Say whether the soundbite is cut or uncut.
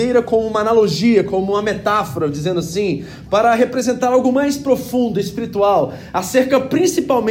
uncut